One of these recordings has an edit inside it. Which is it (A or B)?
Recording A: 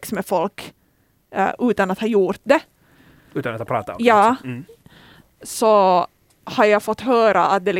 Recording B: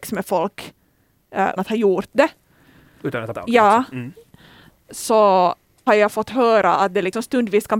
B